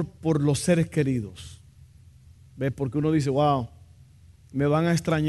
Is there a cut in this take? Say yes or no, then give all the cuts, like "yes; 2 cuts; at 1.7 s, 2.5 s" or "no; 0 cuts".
no; 0 cuts